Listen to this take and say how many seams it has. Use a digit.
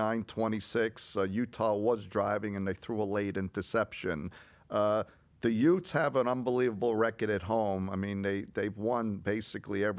0